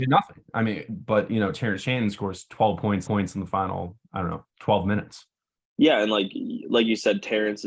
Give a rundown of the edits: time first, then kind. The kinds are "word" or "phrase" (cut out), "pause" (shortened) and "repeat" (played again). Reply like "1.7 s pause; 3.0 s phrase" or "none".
3.1 s repeat; 4.5 s pause